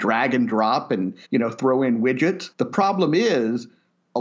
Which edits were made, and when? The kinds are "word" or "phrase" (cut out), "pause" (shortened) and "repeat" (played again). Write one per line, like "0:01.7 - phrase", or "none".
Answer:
0:01.2 - pause
0:02.5 - pause